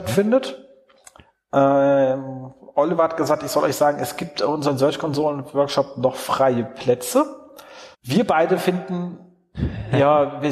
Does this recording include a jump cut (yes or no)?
yes